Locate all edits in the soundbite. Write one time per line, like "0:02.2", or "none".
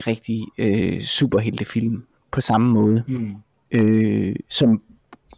none